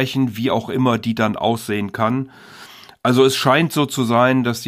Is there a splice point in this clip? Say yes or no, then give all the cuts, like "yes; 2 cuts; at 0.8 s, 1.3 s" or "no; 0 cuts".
no; 0 cuts